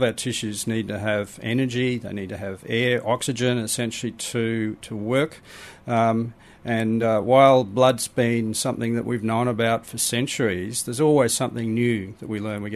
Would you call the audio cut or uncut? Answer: uncut